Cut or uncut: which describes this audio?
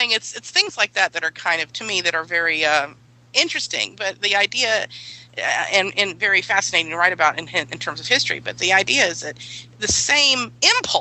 uncut